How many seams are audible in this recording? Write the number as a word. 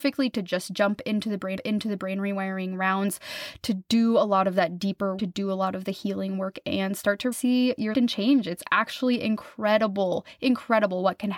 four